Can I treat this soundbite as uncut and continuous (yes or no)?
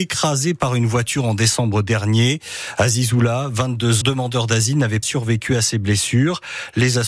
no